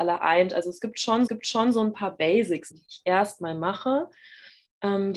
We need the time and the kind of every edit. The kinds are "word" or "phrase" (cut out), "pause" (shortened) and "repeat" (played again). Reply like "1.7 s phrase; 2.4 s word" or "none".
1.3 s repeat; 2.7 s word

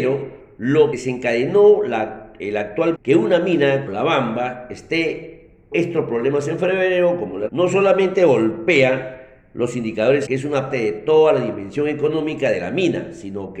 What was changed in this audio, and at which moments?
0.9 s word; 2.4 s word; 2.9 s word; 3.9 s word; 5.7 s word; 7.5 s word; 10.3 s word; 10.7 s word

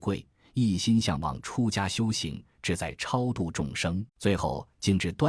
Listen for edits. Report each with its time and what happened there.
4.1 s pause

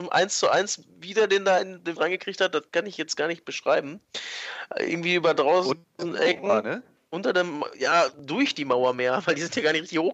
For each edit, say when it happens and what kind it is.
0.9 s pause; 2.0 s word

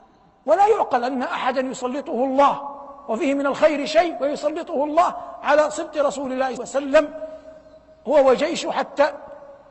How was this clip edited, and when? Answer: 6.6 s phrase

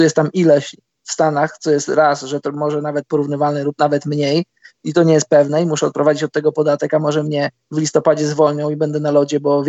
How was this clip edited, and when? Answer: none

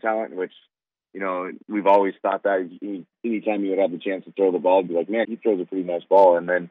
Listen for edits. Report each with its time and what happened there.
1.6 s pause; 5.2 s word

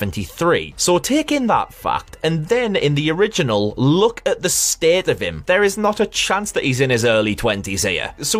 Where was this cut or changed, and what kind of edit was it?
none

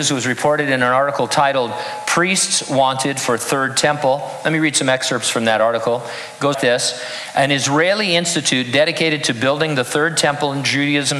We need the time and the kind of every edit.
6.5 s word

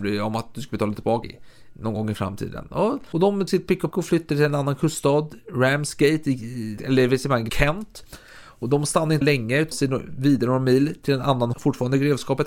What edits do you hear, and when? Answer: 1.2 s word; 3.1 s word; 3.5 s word; 3.9 s word; 6.8 s word; 7.5 s word; 9.2 s word; 9.7 s word; 11.5 s word

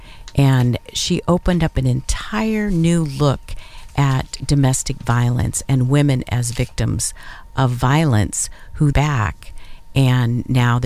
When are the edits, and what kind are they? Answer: 8.9 s phrase

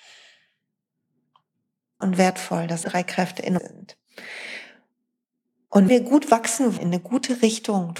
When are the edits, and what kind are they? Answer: 2.0 s word; 2.8 s word; 3.6 s word; 5.9 s word; 6.8 s word

